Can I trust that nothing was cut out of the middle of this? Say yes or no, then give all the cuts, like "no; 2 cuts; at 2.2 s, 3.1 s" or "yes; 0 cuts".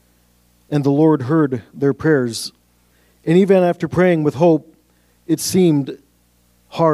yes; 0 cuts